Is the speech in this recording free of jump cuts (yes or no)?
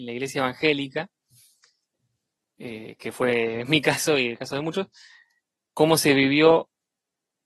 yes